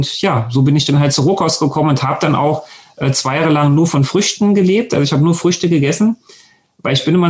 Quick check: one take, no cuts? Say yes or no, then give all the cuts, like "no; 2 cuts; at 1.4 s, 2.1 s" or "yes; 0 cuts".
yes; 0 cuts